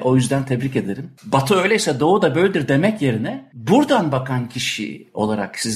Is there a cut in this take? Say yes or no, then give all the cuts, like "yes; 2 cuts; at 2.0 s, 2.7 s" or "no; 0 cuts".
no; 0 cuts